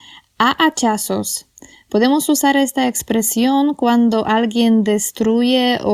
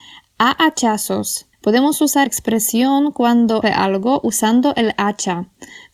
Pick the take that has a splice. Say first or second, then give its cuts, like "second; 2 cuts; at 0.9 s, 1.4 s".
second; 3 cuts; at 1.5 s, 2.3 s, 3.6 s